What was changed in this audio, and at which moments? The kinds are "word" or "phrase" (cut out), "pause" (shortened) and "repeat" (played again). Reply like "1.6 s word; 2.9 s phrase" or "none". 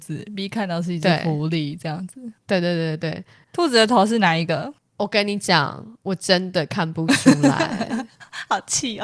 3.4 s pause; 4.8 s pause

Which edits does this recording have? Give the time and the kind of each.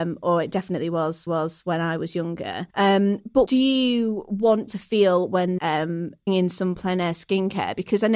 1.3 s repeat; 2.7 s pause; 3.5 s word; 4.7 s word; 5.6 s word; 6.3 s phrase

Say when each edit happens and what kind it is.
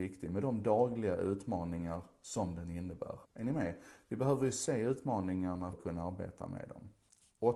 3.3 s pause; 5.7 s word

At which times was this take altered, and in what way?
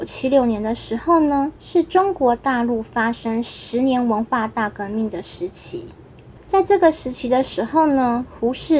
1.6 s pause; 6.4 s pause

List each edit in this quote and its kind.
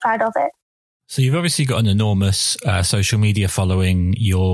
none

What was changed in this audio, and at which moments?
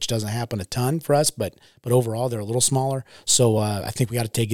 none

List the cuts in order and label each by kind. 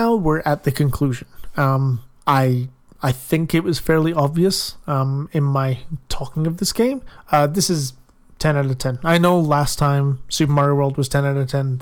none

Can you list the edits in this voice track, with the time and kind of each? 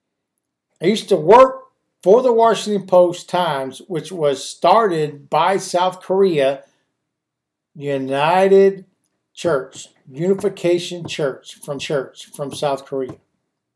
11.8 s repeat

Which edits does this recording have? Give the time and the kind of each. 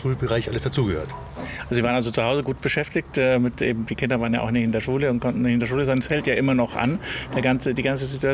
none

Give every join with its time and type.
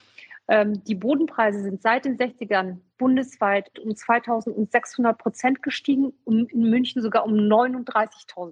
3.7 s phrase

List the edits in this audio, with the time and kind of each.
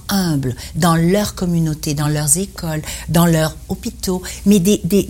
none

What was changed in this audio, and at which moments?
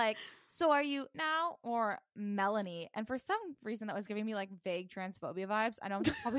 1.1 s phrase

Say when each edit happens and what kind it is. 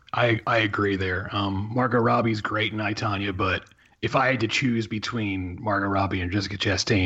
none

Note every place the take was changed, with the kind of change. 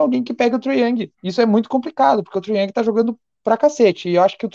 1.1 s pause

